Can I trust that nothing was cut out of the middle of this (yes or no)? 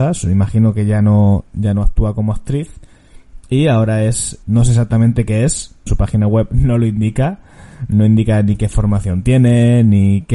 no